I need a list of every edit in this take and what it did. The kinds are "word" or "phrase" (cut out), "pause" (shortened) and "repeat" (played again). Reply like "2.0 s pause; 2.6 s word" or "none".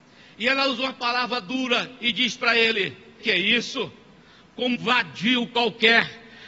3.2 s word; 4.8 s word